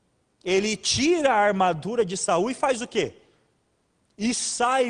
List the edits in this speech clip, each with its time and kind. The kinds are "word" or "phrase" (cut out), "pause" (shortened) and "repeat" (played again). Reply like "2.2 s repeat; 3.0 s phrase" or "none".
none